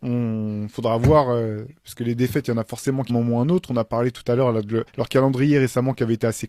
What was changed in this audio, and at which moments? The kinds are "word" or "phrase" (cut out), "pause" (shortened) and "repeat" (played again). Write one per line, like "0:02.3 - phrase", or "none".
0:03.1 - phrase
0:04.9 - pause